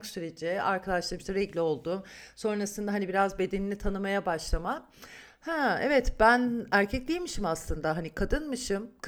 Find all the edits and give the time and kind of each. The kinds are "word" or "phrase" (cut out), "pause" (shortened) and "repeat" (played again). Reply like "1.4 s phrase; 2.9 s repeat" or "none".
none